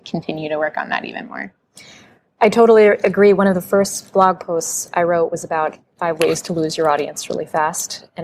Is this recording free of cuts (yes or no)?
yes